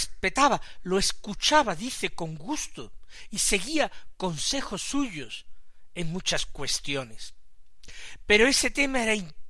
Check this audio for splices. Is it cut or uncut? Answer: uncut